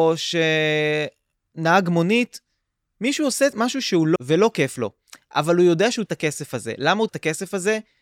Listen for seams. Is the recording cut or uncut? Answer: cut